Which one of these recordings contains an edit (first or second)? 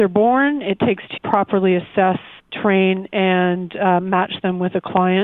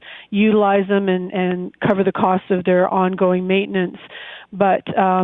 first